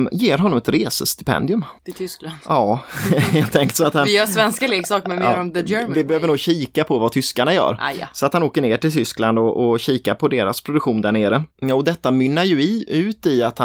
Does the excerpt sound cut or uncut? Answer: cut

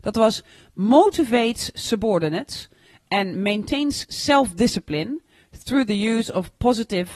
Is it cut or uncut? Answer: uncut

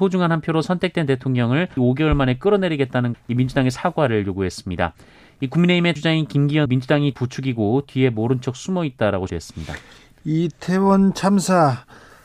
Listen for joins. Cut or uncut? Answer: cut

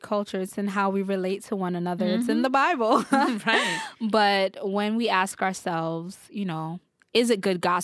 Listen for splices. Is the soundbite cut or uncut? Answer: uncut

